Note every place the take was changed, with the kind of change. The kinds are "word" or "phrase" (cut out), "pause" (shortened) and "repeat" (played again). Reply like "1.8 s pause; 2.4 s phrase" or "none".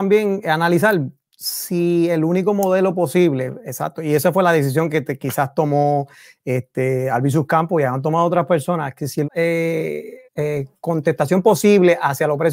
9.2 s word; 10.2 s pause